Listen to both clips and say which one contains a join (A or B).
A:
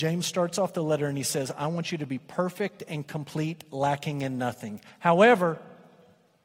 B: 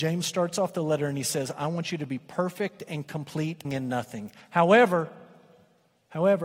B